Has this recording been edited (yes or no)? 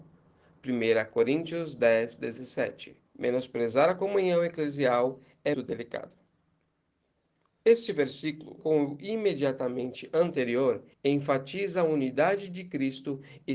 yes